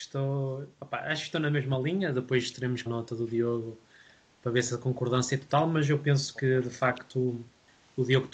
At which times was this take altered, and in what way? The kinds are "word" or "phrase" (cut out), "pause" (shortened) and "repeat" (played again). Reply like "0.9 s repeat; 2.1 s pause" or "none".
2.9 s phrase